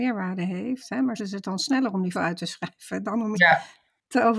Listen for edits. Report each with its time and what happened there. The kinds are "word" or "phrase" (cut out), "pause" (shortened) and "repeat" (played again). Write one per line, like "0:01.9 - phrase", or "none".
0:01.2 - word
0:02.1 - word
0:03.3 - word